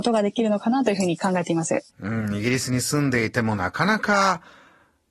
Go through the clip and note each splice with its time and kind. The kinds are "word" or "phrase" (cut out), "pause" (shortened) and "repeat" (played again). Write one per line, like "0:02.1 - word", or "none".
0:01.9 - pause